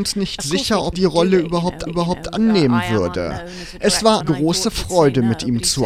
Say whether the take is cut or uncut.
cut